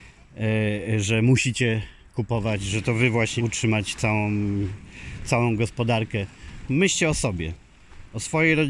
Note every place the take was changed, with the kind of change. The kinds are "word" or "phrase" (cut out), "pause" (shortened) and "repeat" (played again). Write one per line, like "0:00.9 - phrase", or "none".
0:03.4 - word

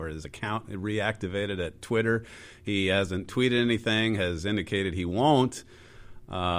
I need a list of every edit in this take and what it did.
none

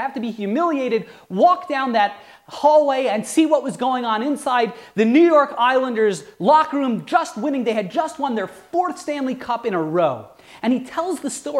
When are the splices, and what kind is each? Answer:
none

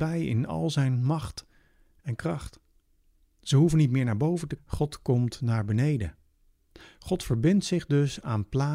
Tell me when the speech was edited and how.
0:04.6 - word

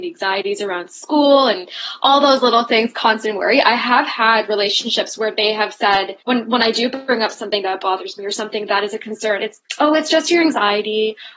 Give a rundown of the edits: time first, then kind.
0:06.2 - pause

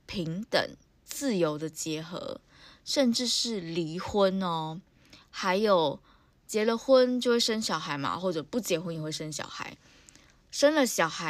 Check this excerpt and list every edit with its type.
none

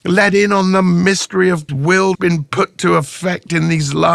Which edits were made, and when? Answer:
0:01.7 - word
0:02.1 - word

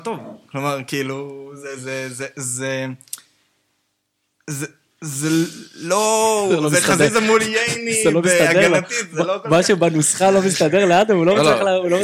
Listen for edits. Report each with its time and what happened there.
none

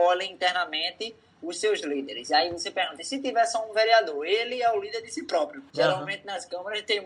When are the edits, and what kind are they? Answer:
0:05.7 - pause

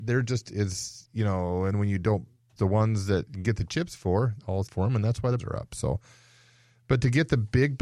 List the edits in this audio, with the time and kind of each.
0:01.7 - word
0:02.6 - word
0:04.7 - phrase
0:05.4 - word

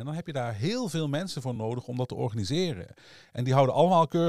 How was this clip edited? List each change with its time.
none

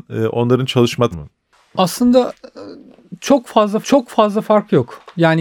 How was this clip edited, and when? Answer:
0:01.1 - phrase
0:03.8 - repeat

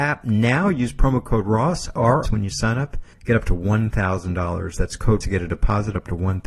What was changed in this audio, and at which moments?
0:02.2 - phrase
0:03.1 - pause
0:05.2 - word

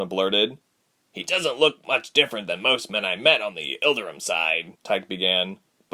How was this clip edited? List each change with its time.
0:04.7 - pause

